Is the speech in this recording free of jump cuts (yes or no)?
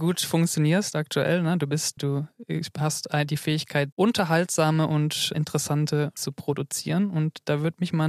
no